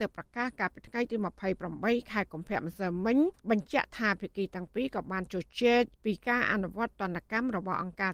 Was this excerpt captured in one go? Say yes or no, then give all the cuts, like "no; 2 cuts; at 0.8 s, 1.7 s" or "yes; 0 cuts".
no; 2 cuts; at 3.3 s, 5.9 s